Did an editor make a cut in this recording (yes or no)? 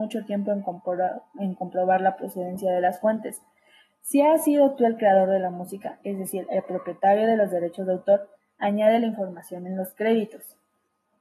no